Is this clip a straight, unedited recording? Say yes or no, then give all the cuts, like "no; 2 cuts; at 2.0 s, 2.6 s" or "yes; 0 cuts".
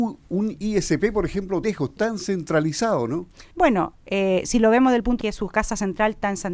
no; 4 cuts; at 1.6 s, 2.0 s, 3.5 s, 5.2 s